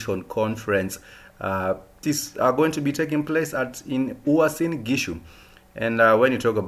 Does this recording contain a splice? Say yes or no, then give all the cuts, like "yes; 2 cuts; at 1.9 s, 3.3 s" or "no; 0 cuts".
yes; 1 cut; at 2.0 s